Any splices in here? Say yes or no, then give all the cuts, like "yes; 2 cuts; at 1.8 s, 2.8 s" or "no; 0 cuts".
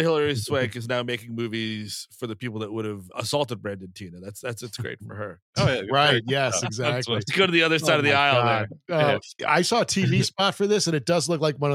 yes; 1 cut; at 3.1 s